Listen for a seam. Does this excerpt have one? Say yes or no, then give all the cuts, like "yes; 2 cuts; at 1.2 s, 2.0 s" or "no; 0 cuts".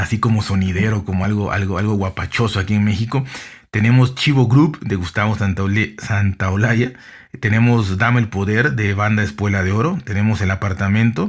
no; 0 cuts